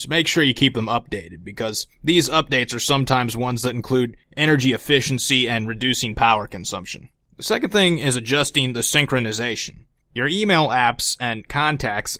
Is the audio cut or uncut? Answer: uncut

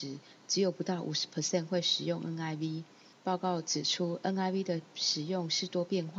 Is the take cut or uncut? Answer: uncut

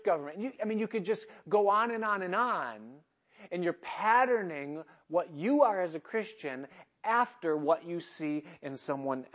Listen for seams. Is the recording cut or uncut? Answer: uncut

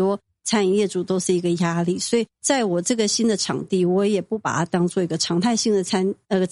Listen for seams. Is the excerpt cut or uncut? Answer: cut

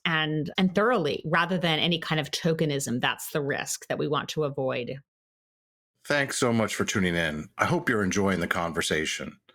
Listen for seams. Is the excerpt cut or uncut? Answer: uncut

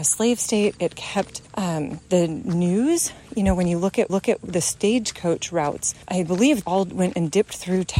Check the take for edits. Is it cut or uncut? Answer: cut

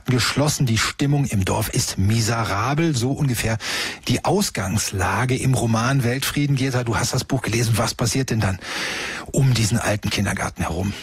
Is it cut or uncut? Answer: uncut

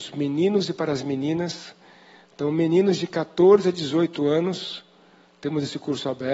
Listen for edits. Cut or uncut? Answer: uncut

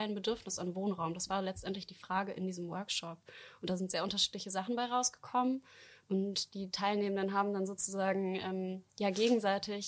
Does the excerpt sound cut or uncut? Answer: cut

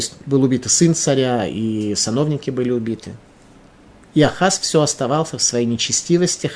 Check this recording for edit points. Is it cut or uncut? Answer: uncut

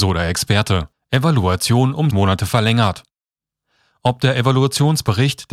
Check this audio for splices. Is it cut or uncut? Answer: cut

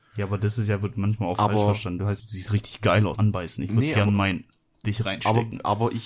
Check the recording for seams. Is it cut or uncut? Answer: cut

